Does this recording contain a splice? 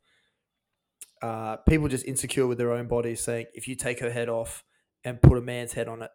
no; 0 cuts

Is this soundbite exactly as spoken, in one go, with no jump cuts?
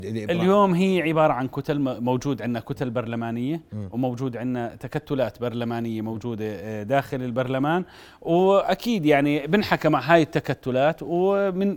yes; 0 cuts

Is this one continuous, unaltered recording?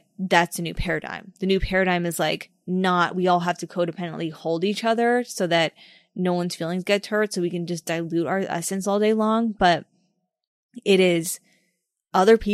yes; 0 cuts

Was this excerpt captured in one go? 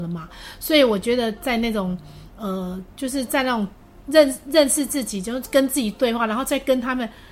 yes; 0 cuts

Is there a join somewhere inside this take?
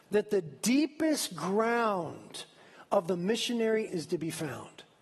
yes; 1 cut; at 3.9 s

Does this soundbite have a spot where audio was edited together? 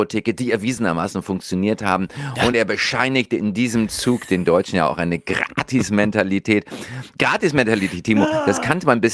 no; 0 cuts

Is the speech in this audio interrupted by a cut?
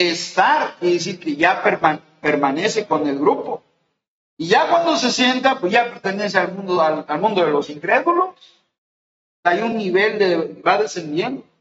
no; 0 cuts

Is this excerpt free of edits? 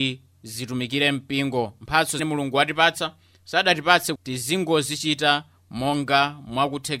no; 2 cuts; at 2.2 s, 4.2 s

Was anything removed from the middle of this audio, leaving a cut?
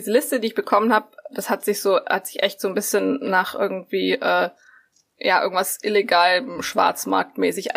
no; 0 cuts

